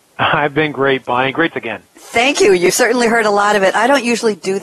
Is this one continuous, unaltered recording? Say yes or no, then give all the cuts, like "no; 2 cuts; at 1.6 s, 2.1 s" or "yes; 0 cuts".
no; 2 cuts; at 1.5 s, 1.9 s